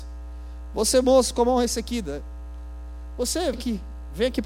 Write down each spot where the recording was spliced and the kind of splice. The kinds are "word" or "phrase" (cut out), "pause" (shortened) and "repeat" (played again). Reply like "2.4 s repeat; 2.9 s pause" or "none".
3.5 s word